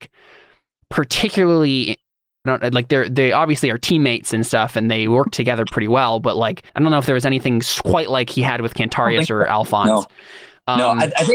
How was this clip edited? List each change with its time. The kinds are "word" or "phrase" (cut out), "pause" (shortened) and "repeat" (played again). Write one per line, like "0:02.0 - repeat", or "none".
0:02.5 - phrase
0:06.7 - pause